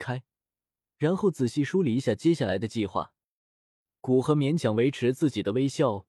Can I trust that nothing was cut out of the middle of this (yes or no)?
yes